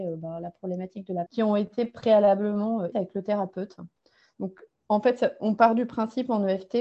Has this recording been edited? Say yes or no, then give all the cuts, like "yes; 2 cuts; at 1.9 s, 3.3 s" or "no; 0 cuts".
yes; 3 cuts; at 1.3 s, 2.9 s, 4.8 s